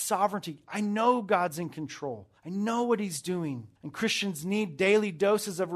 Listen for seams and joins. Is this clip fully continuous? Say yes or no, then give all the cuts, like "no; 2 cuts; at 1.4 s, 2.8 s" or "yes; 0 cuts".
no; 2 cuts; at 2.4 s, 3.8 s